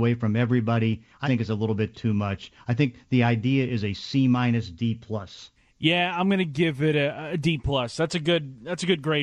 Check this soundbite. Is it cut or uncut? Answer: cut